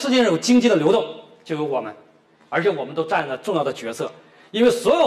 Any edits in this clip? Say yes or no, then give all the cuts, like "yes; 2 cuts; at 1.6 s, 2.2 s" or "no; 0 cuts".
no; 0 cuts